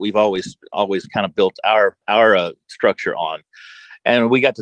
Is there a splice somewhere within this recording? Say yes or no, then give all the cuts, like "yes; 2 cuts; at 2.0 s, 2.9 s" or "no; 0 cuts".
yes; 1 cut; at 2.0 s